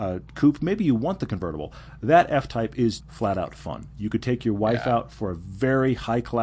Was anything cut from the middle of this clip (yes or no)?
yes